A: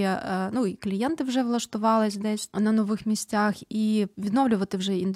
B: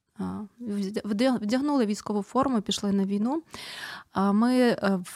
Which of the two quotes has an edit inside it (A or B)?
A